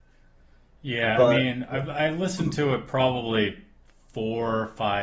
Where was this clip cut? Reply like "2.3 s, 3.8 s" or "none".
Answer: none